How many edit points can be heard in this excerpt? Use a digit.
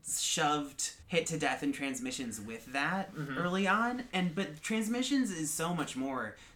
1